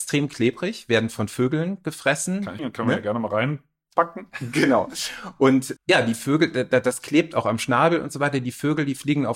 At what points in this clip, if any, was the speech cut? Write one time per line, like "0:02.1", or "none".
0:02.6
0:05.8